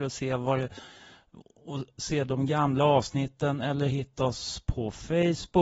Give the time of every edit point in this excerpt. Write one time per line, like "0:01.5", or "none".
none